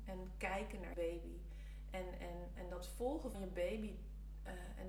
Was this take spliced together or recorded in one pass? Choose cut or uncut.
cut